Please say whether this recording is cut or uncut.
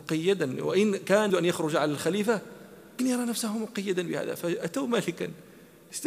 cut